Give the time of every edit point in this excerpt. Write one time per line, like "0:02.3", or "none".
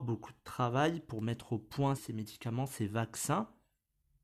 0:02.0